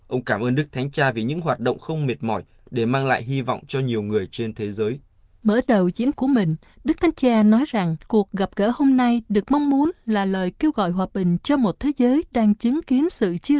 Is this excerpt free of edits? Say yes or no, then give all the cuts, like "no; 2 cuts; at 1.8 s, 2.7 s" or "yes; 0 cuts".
no; 2 cuts; at 6.1 s, 8.0 s